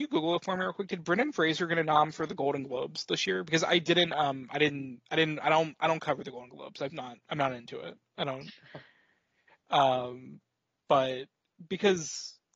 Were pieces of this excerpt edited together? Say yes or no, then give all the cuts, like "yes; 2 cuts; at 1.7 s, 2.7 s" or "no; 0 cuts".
yes; 1 cut; at 6.9 s